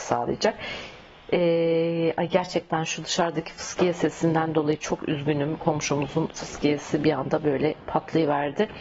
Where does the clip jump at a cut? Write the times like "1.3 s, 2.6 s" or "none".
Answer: none

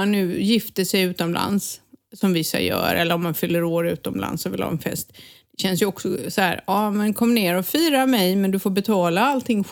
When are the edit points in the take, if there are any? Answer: none

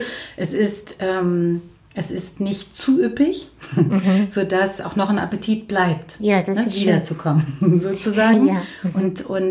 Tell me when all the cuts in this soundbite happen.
none

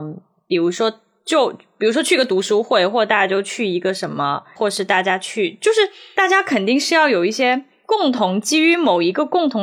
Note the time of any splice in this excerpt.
4.6 s

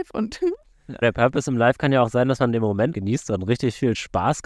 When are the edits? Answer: 1.0 s, 2.9 s

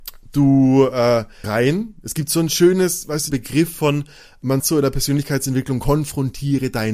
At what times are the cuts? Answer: 1.4 s, 3.3 s, 4.6 s

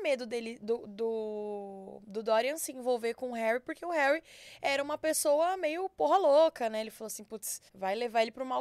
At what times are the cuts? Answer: 7.7 s

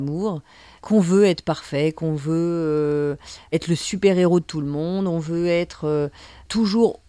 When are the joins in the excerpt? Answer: none

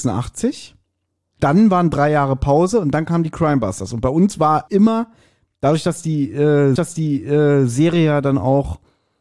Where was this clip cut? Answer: 4.7 s, 6.8 s

